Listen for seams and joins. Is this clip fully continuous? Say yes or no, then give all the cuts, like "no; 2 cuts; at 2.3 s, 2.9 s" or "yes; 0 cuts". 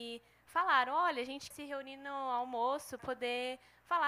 no; 2 cuts; at 1.5 s, 3.0 s